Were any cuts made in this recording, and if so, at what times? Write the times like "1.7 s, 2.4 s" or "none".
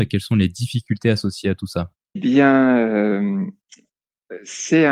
2.2 s